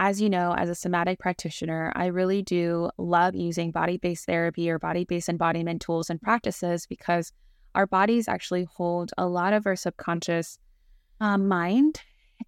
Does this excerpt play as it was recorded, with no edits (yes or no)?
yes